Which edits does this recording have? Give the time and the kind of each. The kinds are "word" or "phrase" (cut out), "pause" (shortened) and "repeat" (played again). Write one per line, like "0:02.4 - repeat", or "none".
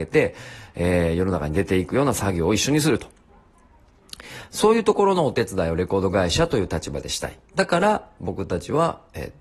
0:07.5 - pause